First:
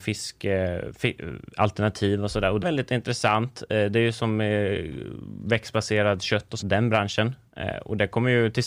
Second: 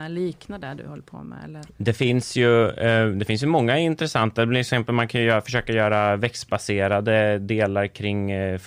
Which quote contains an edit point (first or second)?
first